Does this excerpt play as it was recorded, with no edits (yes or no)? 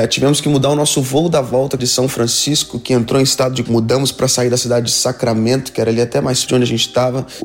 no